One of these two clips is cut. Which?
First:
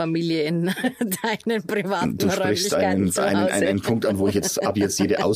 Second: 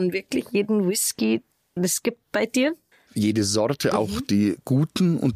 second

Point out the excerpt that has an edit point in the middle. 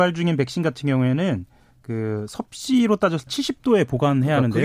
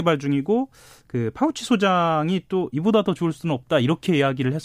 first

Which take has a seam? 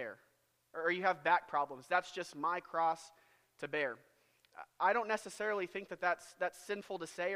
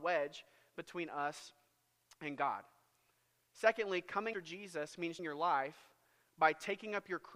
second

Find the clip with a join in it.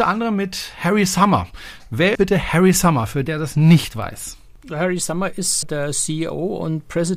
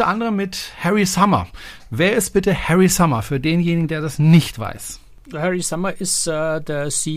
first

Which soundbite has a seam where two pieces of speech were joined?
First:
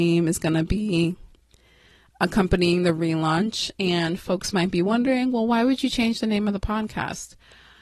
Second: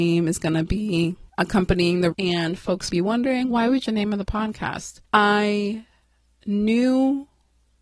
second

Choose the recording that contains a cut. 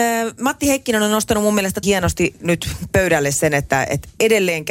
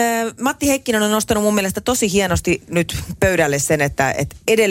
first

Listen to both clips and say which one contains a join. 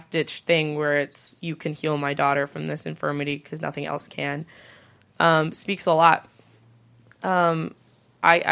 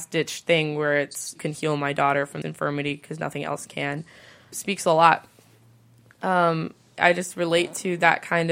second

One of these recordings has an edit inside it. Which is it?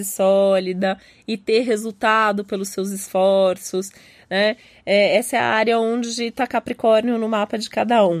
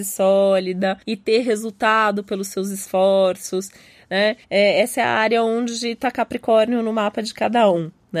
second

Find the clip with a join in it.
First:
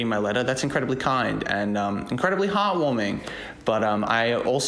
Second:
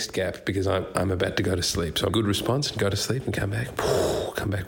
second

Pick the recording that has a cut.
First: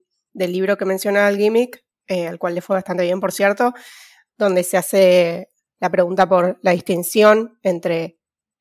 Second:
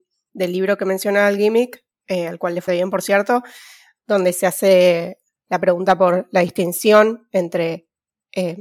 second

